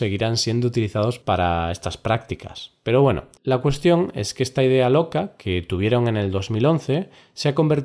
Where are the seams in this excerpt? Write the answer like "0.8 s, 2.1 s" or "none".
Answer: 3.4 s